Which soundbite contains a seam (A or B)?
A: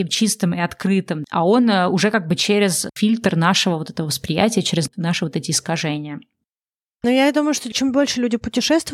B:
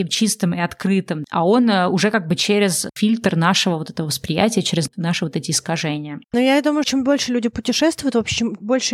B